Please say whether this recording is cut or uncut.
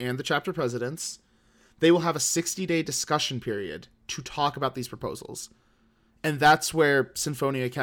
uncut